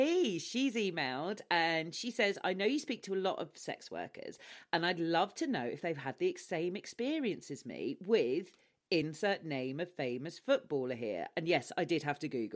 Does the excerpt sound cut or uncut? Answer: uncut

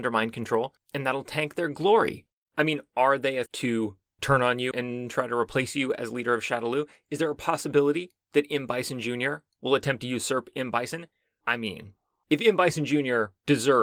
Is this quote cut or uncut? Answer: cut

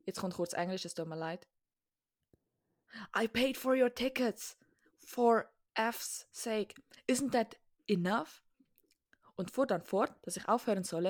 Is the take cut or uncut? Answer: uncut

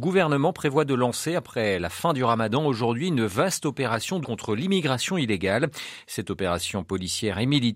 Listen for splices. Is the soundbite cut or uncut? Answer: cut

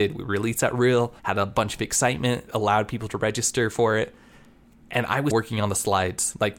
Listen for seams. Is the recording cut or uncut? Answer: cut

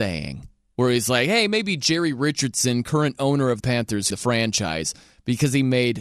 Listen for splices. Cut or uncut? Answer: cut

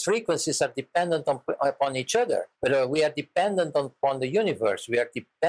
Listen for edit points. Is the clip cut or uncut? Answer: cut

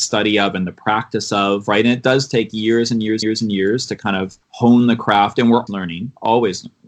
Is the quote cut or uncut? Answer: cut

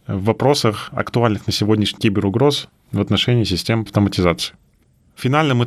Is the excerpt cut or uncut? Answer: cut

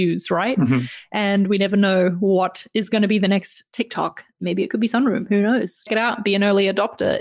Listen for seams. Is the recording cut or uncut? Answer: cut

